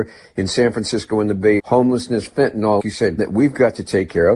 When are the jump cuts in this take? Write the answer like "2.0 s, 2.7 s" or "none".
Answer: 1.6 s, 2.8 s, 3.2 s

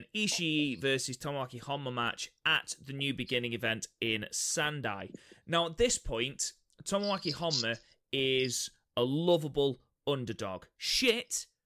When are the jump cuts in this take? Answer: none

